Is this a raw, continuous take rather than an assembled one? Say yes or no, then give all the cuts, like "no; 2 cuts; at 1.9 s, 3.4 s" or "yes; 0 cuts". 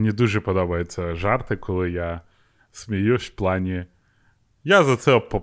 yes; 0 cuts